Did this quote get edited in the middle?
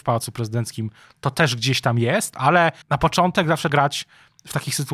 yes; 2 cuts; at 2.8 s, 3.7 s

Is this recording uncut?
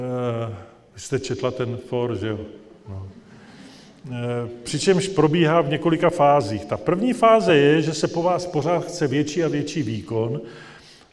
yes; 0 cuts

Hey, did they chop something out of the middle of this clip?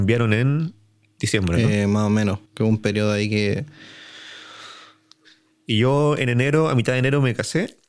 yes; 1 cut; at 2.5 s

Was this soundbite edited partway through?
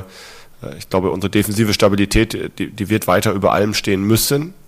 no; 0 cuts

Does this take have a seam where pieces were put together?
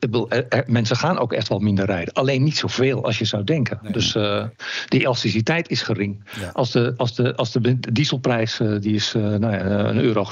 no; 0 cuts

